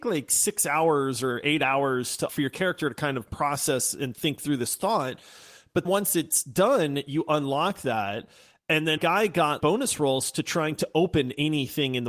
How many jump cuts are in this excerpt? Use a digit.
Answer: 4